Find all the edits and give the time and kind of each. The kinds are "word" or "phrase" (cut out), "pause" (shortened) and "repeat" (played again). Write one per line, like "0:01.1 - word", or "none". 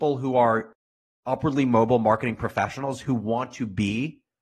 none